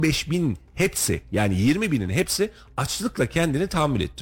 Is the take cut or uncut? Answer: uncut